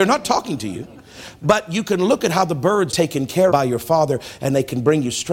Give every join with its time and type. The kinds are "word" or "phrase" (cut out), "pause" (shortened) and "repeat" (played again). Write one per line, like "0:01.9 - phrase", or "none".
0:02.9 - word
0:03.5 - word